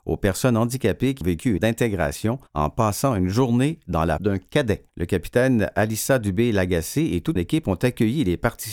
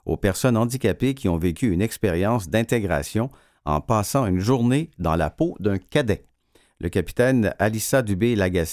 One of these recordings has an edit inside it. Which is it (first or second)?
first